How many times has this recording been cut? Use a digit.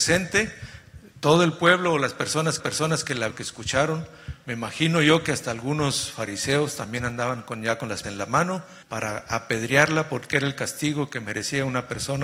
4